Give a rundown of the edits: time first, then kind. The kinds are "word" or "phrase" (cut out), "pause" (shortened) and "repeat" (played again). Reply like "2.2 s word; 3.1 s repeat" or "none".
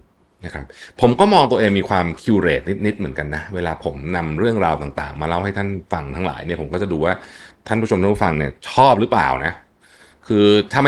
5.9 s pause